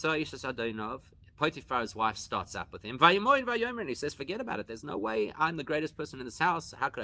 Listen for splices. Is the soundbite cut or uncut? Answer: uncut